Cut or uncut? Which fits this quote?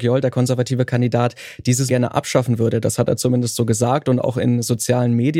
cut